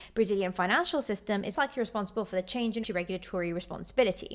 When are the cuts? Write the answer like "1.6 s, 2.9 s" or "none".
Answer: 1.5 s, 2.8 s

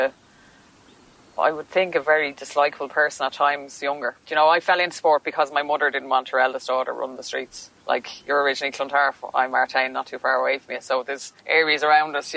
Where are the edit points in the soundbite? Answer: 4.2 s, 7.8 s, 11.4 s

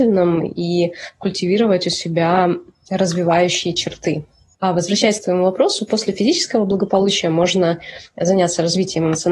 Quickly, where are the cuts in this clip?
none

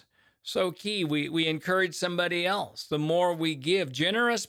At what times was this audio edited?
none

